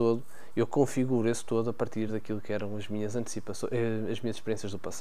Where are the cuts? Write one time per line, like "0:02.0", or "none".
none